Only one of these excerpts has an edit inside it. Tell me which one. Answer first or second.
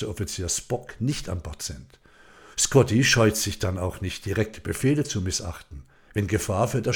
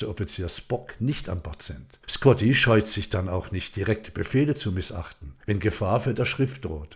second